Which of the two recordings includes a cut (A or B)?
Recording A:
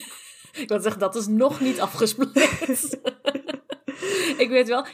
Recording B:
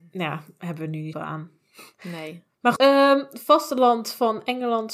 B